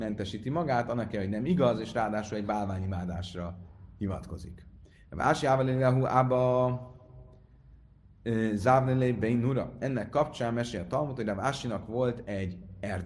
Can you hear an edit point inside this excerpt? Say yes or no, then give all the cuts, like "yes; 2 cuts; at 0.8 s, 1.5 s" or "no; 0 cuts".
no; 0 cuts